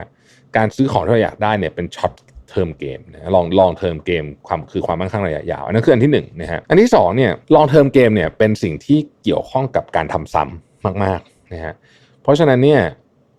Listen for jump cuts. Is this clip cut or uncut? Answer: cut